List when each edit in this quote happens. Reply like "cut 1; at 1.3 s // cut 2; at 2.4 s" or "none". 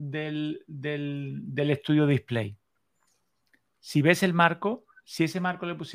none